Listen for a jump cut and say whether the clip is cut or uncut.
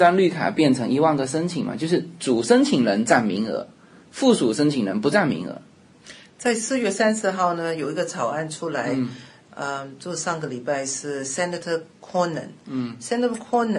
uncut